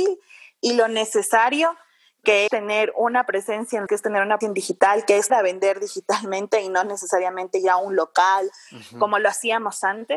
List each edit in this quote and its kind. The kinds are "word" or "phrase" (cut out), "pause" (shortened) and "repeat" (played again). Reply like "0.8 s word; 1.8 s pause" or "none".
2.5 s word; 3.9 s word; 4.4 s word; 5.3 s word